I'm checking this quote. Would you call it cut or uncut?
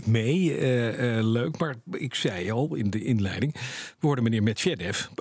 uncut